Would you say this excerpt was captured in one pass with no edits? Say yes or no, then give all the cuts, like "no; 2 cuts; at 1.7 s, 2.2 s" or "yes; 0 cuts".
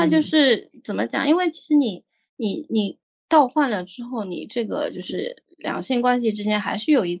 yes; 0 cuts